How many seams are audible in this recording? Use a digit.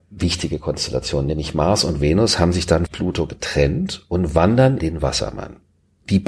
2